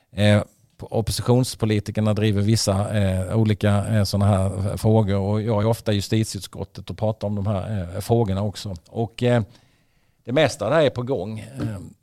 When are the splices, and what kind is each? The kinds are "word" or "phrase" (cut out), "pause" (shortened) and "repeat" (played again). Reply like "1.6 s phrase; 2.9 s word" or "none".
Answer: none